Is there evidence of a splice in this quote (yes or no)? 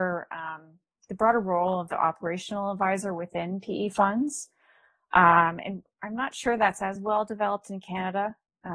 no